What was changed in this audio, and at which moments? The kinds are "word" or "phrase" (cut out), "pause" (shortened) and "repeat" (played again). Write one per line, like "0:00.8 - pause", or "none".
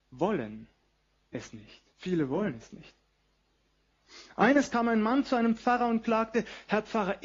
0:01.9 - pause
0:04.7 - word

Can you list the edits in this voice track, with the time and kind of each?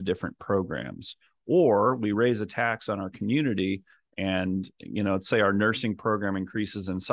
none

